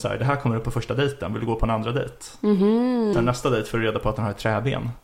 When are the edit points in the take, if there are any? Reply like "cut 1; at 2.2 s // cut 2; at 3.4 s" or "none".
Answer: cut 1; at 3.1 s

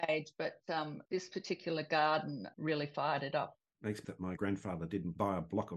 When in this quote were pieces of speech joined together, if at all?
cut 1; at 1.0 s // cut 2; at 2.5 s // cut 3; at 4.0 s // cut 4; at 4.4 s

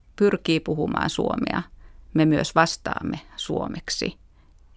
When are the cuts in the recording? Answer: cut 1; at 2.0 s

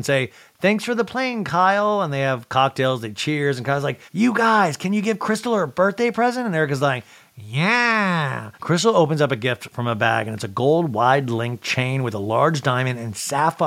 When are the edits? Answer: cut 1; at 4.1 s // cut 2; at 8.5 s

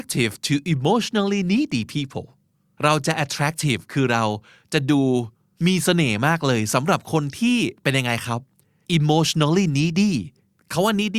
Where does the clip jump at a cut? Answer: none

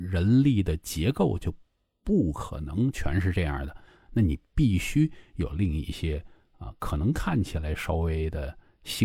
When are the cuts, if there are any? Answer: none

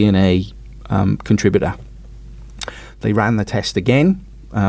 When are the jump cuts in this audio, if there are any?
none

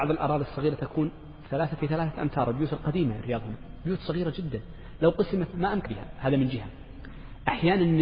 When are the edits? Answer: cut 1; at 1.8 s // cut 2; at 3.2 s // cut 3; at 5.5 s // cut 4; at 5.8 s

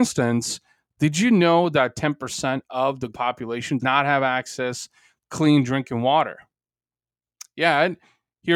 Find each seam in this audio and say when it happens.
cut 1; at 3.1 s // cut 2; at 3.8 s // cut 3; at 5.2 s

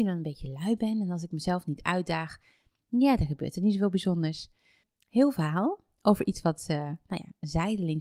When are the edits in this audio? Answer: none

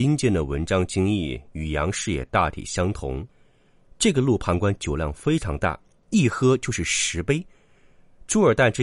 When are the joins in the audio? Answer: cut 1; at 1.5 s // cut 2; at 3.3 s

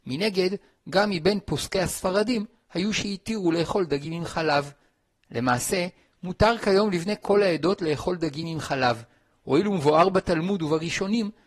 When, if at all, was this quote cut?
none

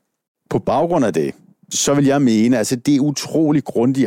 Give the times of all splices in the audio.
none

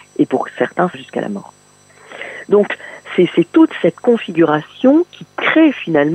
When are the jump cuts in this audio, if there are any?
cut 1; at 0.9 s

